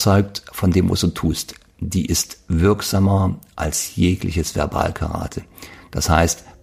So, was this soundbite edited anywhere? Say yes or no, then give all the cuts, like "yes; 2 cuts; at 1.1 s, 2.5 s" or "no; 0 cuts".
no; 0 cuts